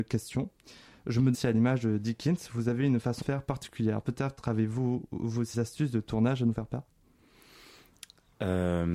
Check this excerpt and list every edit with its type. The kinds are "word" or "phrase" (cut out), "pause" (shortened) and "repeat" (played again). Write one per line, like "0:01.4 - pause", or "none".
0:01.3 - word
0:03.2 - word
0:05.5 - word